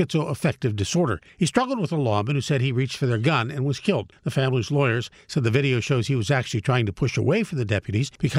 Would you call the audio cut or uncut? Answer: uncut